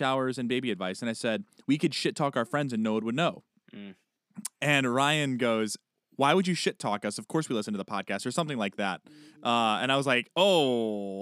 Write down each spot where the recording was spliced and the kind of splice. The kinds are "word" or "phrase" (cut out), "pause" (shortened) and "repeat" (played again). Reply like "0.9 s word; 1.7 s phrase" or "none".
none